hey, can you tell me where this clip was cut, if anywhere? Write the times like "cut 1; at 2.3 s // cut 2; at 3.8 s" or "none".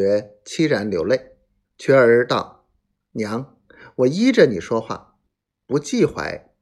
cut 1; at 1.6 s